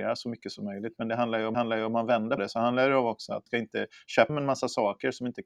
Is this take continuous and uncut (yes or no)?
no